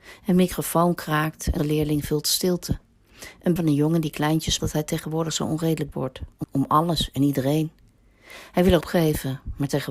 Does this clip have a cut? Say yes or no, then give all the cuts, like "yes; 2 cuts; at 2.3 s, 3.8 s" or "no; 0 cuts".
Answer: yes; 6 cuts; at 1.6 s, 3.6 s, 4.6 s, 5.9 s, 6.4 s, 8.8 s